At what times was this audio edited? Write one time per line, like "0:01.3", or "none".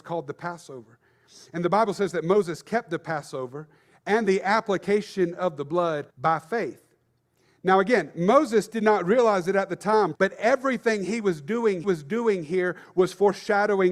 0:06.1
0:10.1
0:11.8

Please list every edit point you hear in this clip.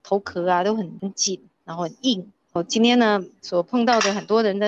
0:02.6

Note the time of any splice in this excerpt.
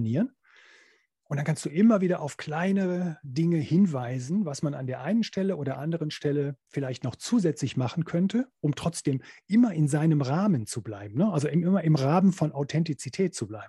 0:06.6

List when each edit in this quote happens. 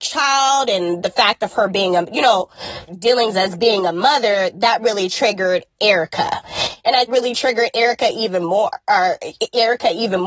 0:02.9
0:07.1

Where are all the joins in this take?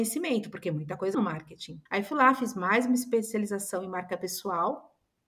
0:01.1
0:01.9

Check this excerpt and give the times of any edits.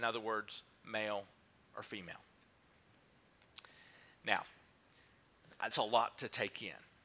0:05.7

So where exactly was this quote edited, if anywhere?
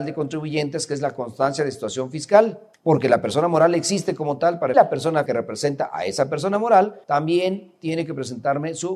0:02.7
0:04.7
0:05.3
0:07.0

